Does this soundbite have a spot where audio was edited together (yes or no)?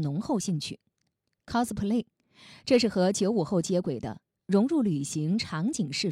no